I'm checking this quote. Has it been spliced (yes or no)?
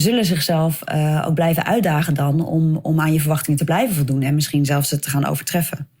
no